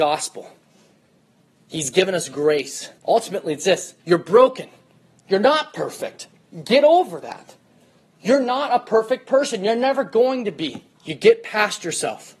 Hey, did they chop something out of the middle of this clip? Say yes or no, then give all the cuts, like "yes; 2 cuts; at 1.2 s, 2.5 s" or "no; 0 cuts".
yes; 3 cuts; at 3.0 s, 4.0 s, 10.9 s